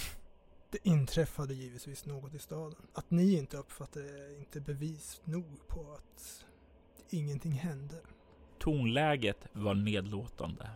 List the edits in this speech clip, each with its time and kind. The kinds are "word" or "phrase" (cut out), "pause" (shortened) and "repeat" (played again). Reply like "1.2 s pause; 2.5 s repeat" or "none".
2.9 s pause